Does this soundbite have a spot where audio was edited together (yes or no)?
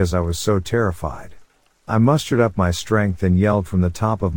no